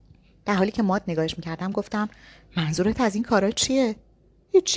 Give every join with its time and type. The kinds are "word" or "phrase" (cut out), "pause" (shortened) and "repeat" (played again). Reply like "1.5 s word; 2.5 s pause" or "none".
none